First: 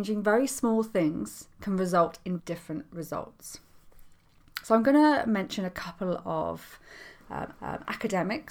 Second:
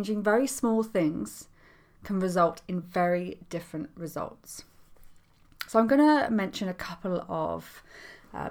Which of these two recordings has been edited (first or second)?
first